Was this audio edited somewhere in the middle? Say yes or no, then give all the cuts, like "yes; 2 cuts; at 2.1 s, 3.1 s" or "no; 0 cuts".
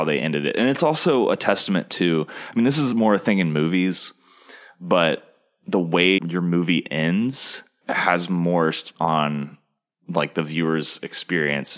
yes; 3 cuts; at 6.2 s, 7.8 s, 8.9 s